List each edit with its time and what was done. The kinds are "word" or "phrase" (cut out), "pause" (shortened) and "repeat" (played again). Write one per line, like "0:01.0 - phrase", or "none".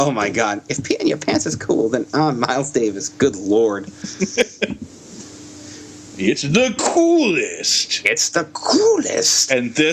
none